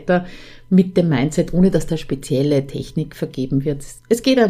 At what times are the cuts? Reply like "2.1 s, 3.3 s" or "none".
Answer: 1.9 s